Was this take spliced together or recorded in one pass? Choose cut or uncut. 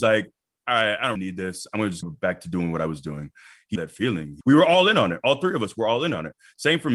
cut